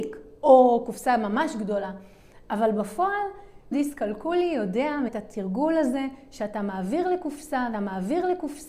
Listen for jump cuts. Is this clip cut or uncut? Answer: cut